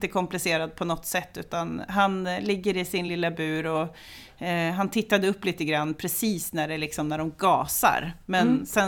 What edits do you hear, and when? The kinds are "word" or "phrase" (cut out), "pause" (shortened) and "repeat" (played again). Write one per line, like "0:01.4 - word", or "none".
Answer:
none